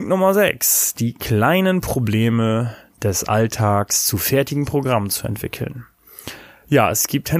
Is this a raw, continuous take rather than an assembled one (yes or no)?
yes